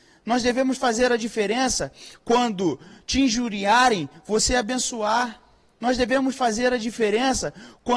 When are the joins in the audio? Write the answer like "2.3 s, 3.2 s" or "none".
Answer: none